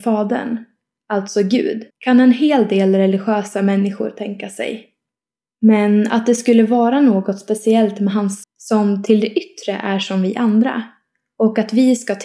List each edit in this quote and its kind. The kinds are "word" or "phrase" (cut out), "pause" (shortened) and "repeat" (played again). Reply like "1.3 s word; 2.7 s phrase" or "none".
1.9 s pause; 8.4 s word